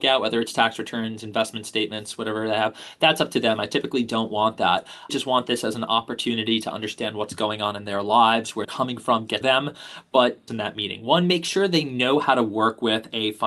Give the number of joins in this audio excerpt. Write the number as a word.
four